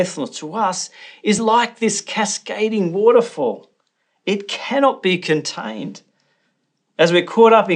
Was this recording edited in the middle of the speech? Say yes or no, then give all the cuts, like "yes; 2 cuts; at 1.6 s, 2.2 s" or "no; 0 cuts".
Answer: no; 0 cuts